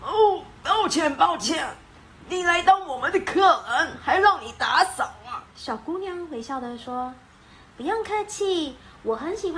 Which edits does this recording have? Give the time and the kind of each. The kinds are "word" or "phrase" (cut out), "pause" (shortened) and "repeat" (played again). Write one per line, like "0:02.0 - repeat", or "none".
0:05.5 - pause